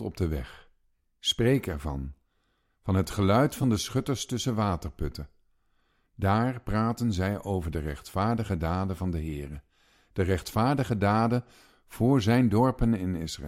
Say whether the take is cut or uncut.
uncut